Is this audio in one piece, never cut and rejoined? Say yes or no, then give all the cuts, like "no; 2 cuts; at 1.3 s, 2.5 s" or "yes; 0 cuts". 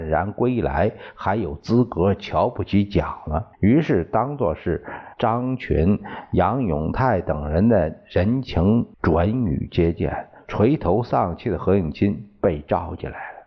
no; 3 cuts; at 3.5 s, 5.1 s, 8.9 s